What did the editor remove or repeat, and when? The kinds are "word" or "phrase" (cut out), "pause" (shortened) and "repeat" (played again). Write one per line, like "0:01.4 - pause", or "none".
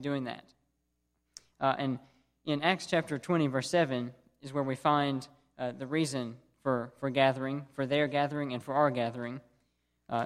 none

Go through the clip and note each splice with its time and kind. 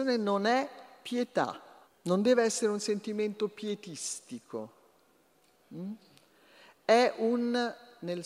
0:01.9 - pause

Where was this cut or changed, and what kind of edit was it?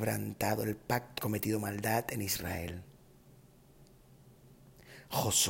0:01.2 - phrase

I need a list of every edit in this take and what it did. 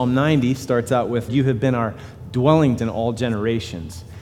0:01.3 - word
0:02.8 - word

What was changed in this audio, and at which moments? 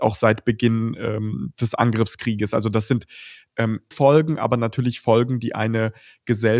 0:01.5 - word
0:03.9 - word

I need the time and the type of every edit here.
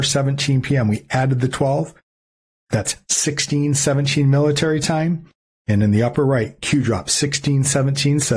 none

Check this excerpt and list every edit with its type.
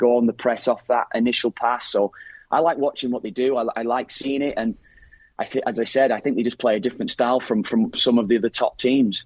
none

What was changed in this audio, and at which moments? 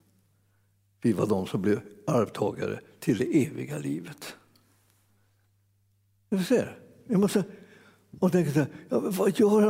none

